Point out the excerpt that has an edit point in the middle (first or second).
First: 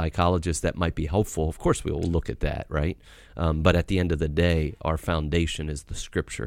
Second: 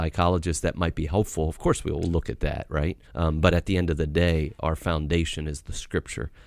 second